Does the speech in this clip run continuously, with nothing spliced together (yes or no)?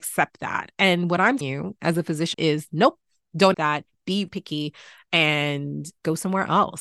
no